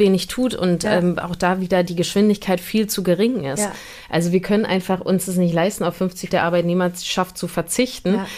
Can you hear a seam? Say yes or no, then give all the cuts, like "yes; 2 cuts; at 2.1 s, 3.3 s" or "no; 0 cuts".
yes; 1 cut; at 6.3 s